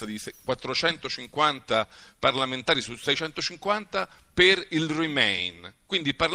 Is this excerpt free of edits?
yes; 0 cuts

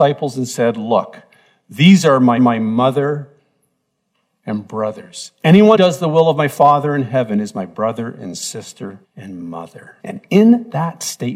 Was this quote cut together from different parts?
yes; 4 cuts; at 2.4 s, 5.7 s, 9.0 s, 10.0 s

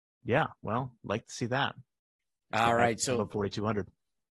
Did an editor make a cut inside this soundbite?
no; 0 cuts

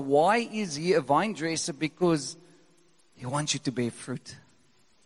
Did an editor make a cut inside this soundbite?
no; 0 cuts

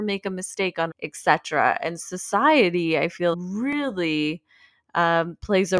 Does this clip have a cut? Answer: yes; 3 cuts; at 0.9 s, 2.0 s, 3.3 s

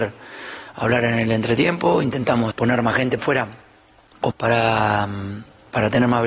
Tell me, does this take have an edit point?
yes; 3 cuts; at 2.5 s, 3.2 s, 4.3 s

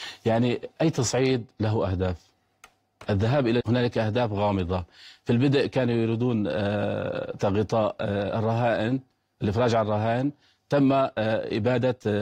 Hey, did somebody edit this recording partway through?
yes; 2 cuts; at 3.6 s, 7.4 s

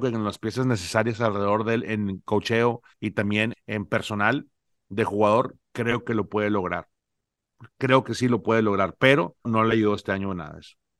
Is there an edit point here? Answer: yes; 3 cuts; at 2.9 s, 3.5 s, 9.4 s

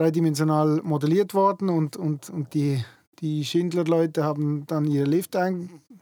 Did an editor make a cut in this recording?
no; 0 cuts

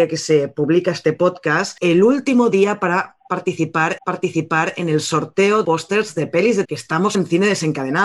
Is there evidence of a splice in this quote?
yes; 5 cuts; at 1.8 s, 4.0 s, 5.6 s, 6.6 s, 7.1 s

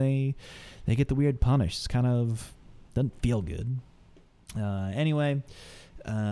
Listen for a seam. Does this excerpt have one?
yes; 1 cut; at 2.9 s

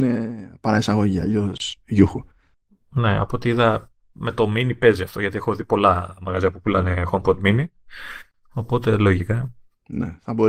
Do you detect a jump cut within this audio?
no; 0 cuts

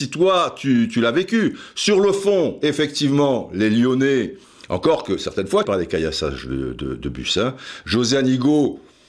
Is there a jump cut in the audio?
yes; 2 cuts; at 4.4 s, 5.6 s

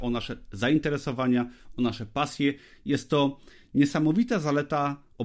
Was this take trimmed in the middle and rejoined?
no; 0 cuts

